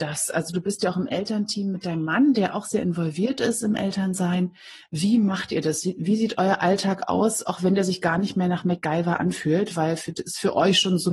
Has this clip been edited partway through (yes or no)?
no